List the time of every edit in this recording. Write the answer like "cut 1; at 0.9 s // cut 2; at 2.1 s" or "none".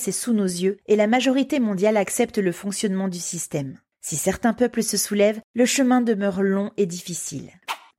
none

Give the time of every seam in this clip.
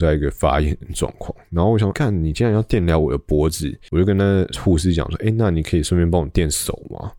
cut 1; at 1.9 s

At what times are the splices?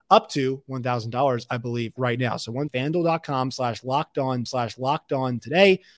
cut 1; at 2.7 s // cut 2; at 4.5 s

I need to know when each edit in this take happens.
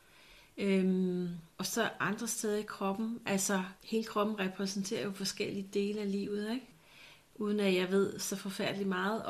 cut 1; at 1.5 s // cut 2; at 3.8 s

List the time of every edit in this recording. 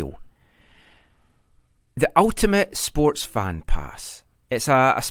none

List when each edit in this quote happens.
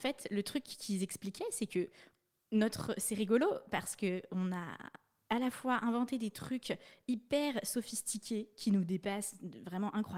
none

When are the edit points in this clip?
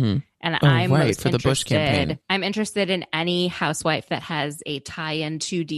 cut 1; at 2.2 s

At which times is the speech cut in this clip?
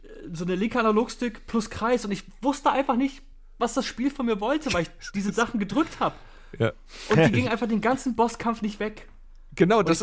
none

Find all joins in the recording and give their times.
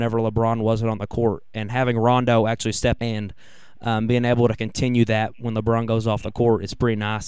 cut 1; at 3.0 s

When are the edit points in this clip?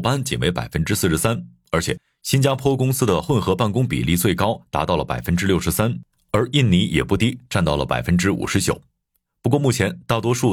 none

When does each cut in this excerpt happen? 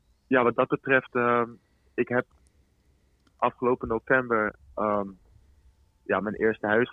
none

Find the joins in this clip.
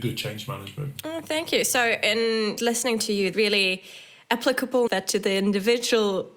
cut 1; at 2.6 s // cut 2; at 3.3 s // cut 3; at 4.9 s

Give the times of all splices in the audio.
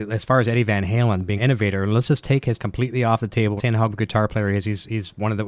cut 1; at 1.4 s // cut 2; at 2.6 s // cut 3; at 3.6 s // cut 4; at 3.9 s

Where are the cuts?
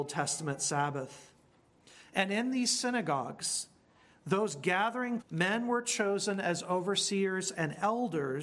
cut 1; at 5.2 s

